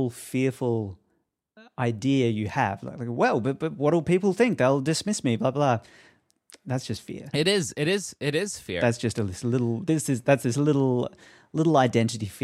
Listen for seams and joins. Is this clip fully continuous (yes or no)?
yes